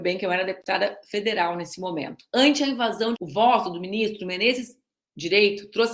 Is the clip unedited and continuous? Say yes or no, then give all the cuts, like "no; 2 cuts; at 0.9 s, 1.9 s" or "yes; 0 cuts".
no; 1 cut; at 3.2 s